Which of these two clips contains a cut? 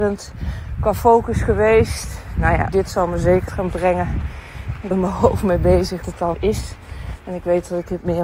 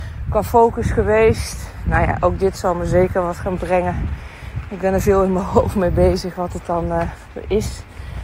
first; 5 cuts; at 2.7 s, 3.5 s, 4.9 s, 6.0 s, 6.3 s

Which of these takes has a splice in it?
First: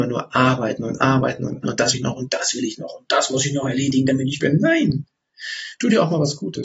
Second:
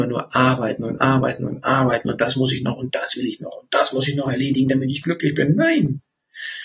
first; 3 cuts; at 1.6 s, 1.9 s, 4.4 s

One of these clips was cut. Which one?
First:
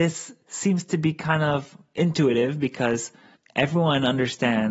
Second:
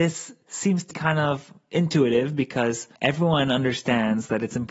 second; 2 cuts; at 0.9 s, 3.0 s

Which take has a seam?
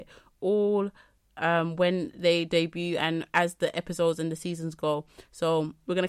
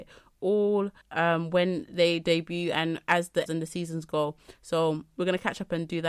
second; 2 cuts; at 1.0 s, 3.5 s

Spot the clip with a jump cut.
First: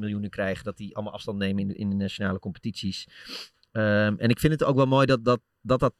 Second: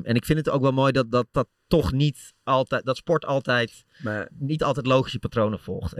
second; 2 cuts; at 1.3 s, 4.3 s

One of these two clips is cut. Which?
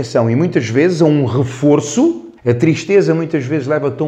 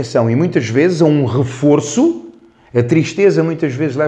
first; 1 cut; at 2.4 s

